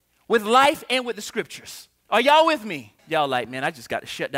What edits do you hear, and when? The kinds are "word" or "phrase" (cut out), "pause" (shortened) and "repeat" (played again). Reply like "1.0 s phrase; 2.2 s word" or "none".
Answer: 2.0 s pause; 3.0 s pause